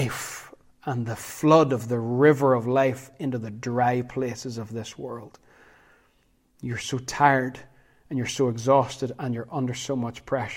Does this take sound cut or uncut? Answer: uncut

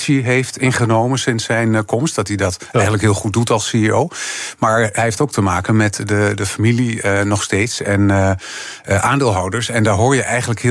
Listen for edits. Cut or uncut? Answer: uncut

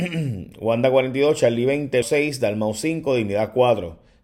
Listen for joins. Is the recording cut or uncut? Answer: cut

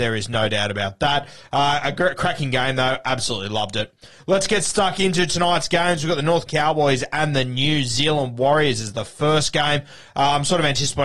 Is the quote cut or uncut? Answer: cut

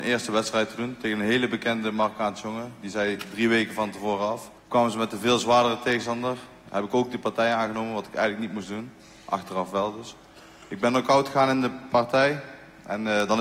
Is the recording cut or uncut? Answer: cut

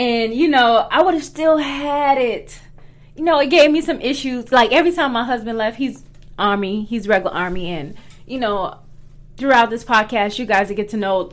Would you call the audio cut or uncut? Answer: uncut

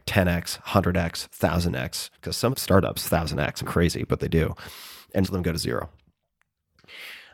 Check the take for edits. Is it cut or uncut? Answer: cut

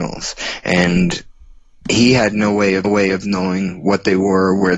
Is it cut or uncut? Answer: cut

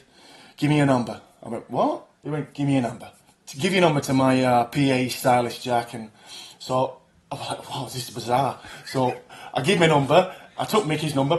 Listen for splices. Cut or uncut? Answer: uncut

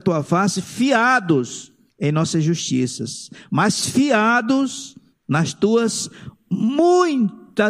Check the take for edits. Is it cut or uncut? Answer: cut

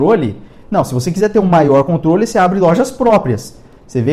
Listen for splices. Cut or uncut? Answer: uncut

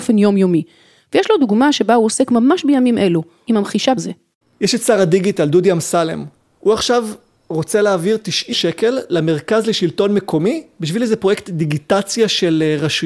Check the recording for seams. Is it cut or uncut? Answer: cut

